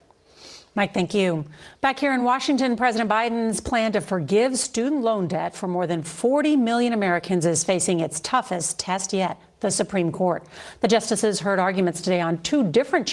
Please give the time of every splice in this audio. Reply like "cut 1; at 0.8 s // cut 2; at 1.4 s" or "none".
none